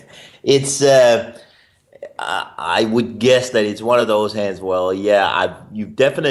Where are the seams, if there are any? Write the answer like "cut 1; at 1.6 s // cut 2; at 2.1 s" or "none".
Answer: none